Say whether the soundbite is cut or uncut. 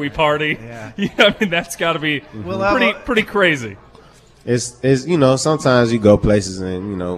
uncut